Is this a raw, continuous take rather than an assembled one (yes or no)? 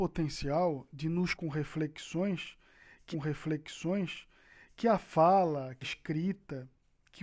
no